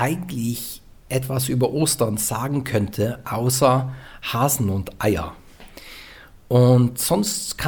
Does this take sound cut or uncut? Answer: uncut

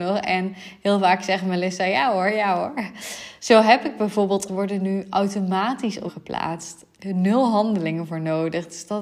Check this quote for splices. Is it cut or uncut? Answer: cut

